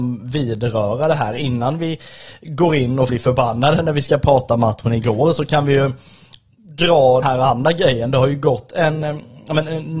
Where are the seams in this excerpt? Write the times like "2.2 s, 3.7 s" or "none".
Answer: 3.1 s, 7.2 s

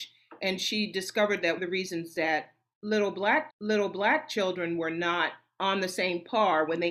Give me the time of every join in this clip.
1.6 s, 3.5 s

